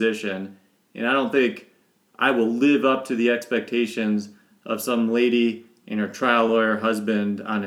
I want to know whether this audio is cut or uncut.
uncut